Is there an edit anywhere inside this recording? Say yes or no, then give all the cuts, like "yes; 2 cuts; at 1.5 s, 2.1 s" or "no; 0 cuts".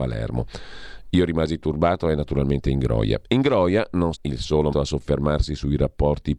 yes; 2 cuts; at 4.1 s, 4.7 s